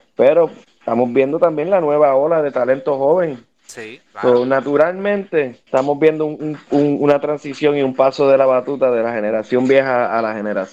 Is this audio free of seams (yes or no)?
no